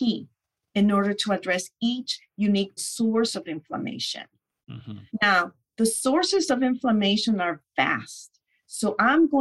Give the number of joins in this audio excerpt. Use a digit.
2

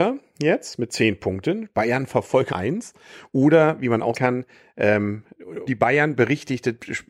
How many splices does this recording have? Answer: 3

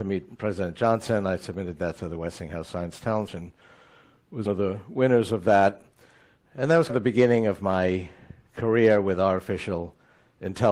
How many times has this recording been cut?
3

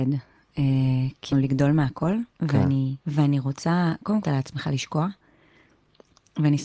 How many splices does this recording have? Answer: 3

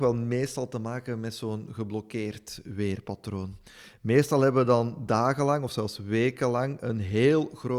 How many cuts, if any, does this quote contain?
0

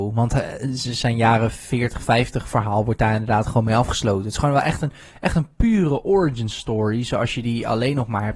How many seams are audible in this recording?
0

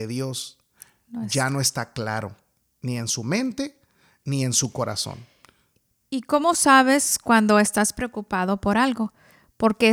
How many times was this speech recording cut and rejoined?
0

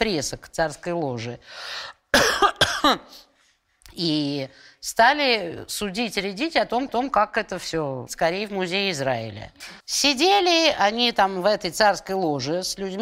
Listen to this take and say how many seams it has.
3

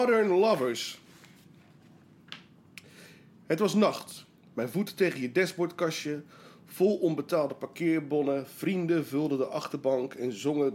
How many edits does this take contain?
0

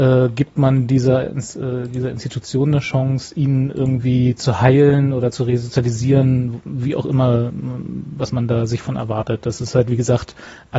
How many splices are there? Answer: 0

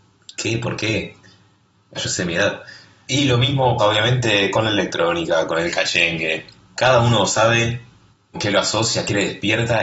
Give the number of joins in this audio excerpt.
3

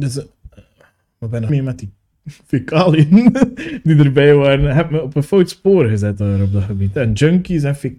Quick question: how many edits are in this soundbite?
1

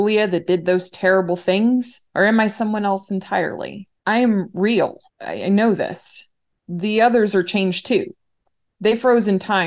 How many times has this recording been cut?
3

